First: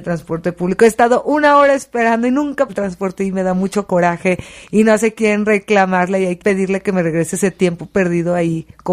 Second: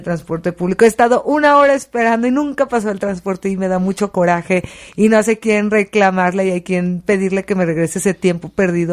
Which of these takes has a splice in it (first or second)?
first